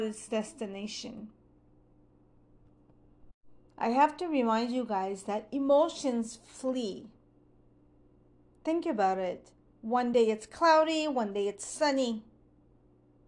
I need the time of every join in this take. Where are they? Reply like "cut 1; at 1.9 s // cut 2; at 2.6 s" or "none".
none